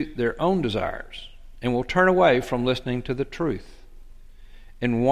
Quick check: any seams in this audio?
no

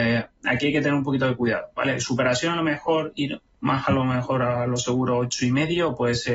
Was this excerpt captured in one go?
yes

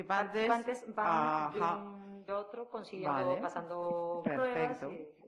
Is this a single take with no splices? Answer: no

